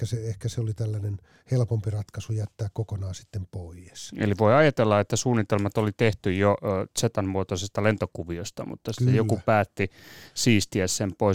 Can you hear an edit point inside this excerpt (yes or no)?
no